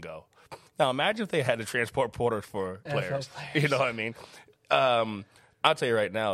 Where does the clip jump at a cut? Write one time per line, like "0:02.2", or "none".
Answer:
0:02.9